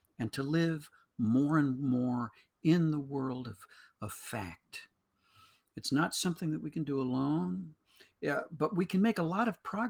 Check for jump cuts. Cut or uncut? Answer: uncut